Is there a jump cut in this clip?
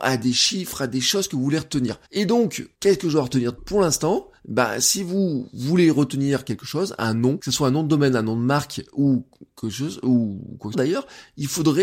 yes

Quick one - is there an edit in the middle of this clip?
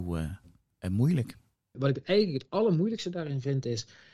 no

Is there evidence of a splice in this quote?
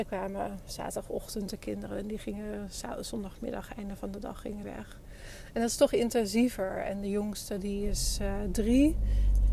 yes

